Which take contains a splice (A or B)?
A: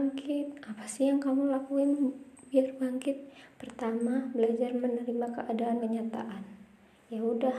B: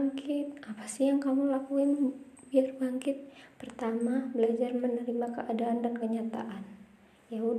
A